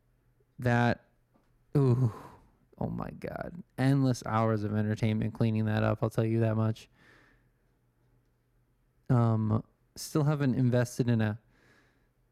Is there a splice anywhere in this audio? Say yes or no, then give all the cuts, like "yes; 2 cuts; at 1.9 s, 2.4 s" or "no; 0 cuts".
no; 0 cuts